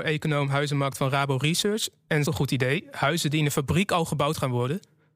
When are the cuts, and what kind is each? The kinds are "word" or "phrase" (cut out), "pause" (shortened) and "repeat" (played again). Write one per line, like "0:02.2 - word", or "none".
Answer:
0:02.3 - phrase